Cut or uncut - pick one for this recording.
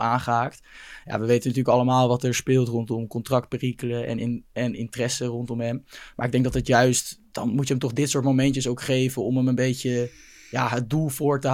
uncut